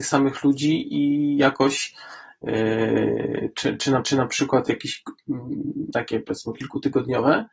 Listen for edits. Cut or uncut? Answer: cut